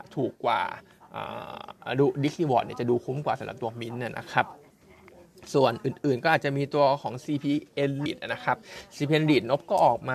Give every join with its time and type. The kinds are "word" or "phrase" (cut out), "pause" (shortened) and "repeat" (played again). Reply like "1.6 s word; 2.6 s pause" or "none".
8.1 s word